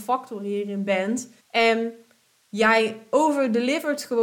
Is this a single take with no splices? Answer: no; 1 cut; at 1.4 s

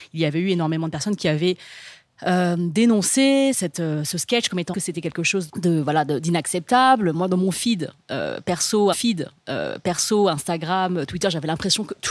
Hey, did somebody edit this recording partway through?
yes; 4 cuts; at 3.5 s, 4.7 s, 5.5 s, 8.9 s

